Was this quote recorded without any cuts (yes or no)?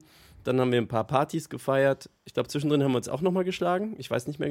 no